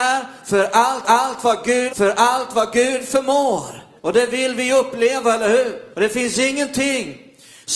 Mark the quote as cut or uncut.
cut